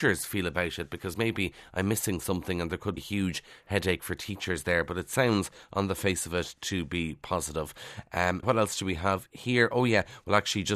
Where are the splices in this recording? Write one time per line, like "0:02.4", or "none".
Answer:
0:03.0
0:08.4